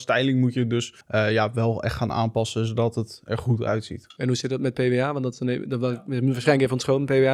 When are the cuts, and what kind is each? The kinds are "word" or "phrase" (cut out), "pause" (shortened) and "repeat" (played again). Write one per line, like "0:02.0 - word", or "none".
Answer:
0:01.0 - pause